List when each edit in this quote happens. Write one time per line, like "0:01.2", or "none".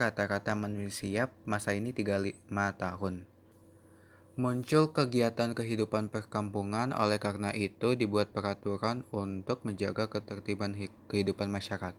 none